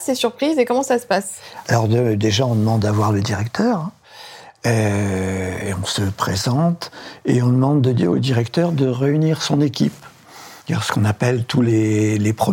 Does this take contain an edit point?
yes; 1 cut; at 10.6 s

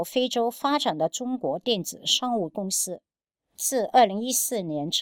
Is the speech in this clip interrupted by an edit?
no; 0 cuts

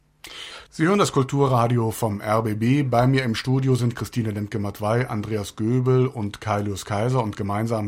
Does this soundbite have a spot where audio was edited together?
no; 0 cuts

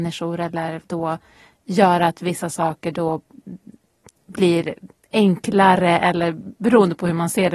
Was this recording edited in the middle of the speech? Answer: no; 0 cuts

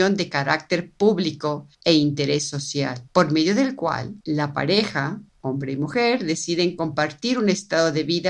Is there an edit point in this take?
yes; 4 cuts; at 1.7 s, 3.1 s, 4.2 s, 5.3 s

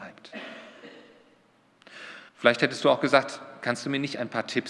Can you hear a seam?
yes; 1 cut; at 2.3 s

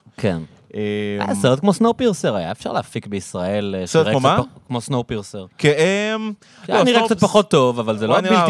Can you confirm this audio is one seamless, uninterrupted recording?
yes; 0 cuts

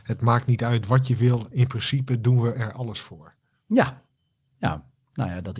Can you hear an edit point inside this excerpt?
no; 0 cuts

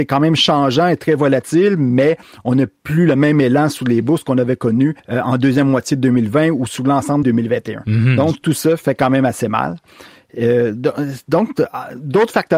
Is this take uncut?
no; 2 cuts; at 5.0 s, 7.2 s

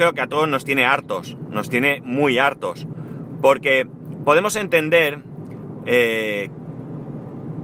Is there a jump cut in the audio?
no; 0 cuts

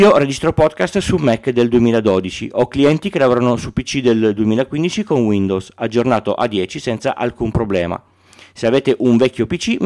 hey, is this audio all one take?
yes; 0 cuts

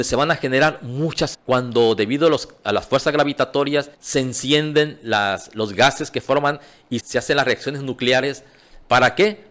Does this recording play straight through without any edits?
no; 3 cuts; at 1.3 s, 3.9 s, 7.0 s

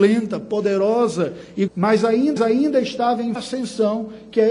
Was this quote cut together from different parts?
yes; 3 cuts; at 1.7 s, 2.4 s, 3.4 s

